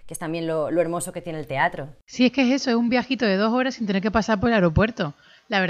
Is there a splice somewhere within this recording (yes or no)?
no